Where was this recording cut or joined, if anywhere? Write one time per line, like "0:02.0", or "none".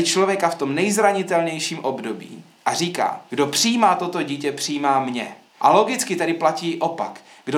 0:05.5